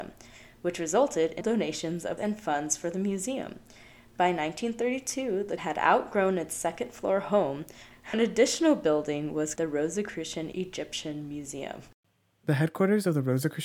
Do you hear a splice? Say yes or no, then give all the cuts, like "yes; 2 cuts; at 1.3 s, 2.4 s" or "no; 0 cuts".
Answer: yes; 6 cuts; at 1.4 s, 2.2 s, 5.6 s, 8.1 s, 9.6 s, 10.5 s